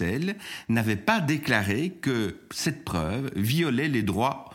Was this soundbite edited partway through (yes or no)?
no